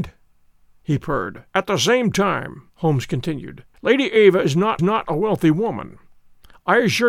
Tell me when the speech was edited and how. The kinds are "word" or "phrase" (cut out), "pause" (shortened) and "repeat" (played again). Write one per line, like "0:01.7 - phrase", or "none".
0:01.5 - pause
0:02.7 - pause
0:03.7 - pause
0:04.8 - repeat